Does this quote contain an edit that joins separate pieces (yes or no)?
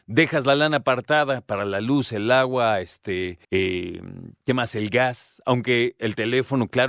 yes